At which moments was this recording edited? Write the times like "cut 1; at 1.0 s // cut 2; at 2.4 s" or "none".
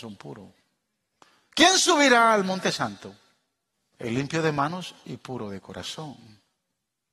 cut 1; at 3.7 s